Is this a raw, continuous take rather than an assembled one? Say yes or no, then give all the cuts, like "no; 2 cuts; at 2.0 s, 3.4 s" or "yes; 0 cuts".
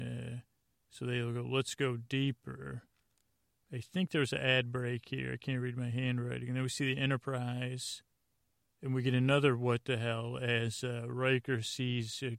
yes; 0 cuts